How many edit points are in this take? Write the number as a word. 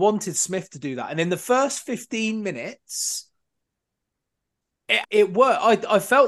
one